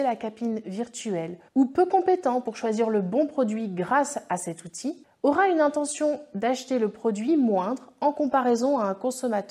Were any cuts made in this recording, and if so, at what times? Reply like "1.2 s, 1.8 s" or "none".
1.5 s

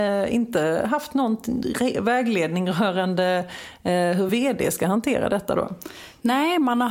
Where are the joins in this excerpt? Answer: none

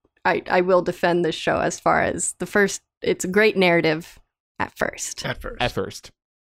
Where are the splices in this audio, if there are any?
none

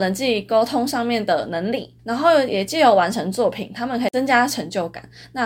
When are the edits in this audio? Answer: 2.0 s

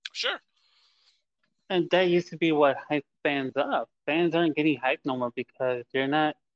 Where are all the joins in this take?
4.0 s

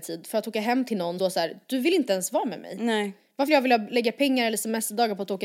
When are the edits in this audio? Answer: 1.2 s, 3.5 s

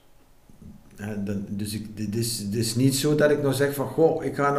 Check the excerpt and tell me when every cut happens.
none

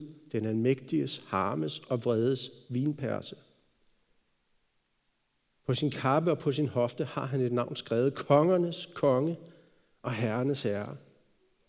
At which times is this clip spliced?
none

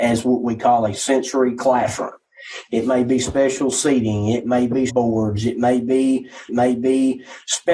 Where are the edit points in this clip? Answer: 4.9 s, 6.5 s

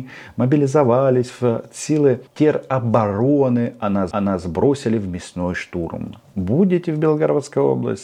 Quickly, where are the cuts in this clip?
2.3 s, 4.1 s

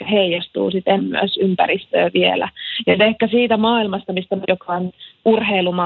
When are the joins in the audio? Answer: 1.0 s, 3.0 s, 4.4 s

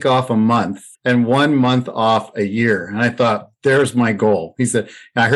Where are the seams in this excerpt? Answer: 0.9 s

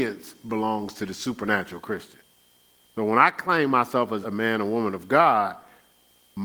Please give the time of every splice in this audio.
4.2 s

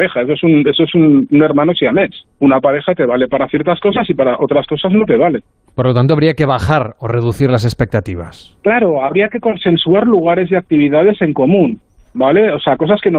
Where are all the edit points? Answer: 2.3 s

